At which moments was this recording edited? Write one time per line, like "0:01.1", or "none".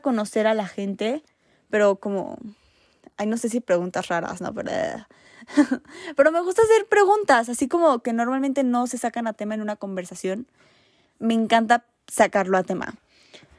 none